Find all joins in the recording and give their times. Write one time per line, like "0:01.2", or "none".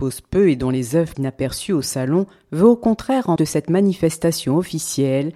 0:01.1
0:03.4